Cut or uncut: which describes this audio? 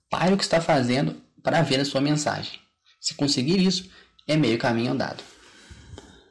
uncut